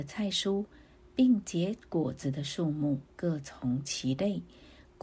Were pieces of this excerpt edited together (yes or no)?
yes